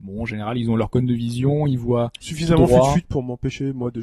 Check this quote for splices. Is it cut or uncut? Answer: uncut